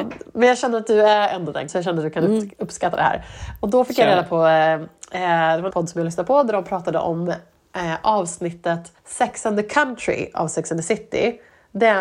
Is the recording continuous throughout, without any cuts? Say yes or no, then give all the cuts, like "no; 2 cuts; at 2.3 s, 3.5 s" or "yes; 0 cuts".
no; 3 cuts; at 1.7 s, 5.7 s, 9.0 s